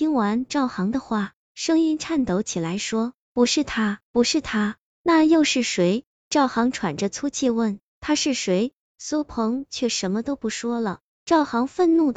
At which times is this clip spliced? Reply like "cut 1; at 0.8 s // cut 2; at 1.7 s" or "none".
cut 1; at 4.0 s